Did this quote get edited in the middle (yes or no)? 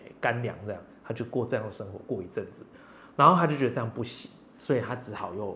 no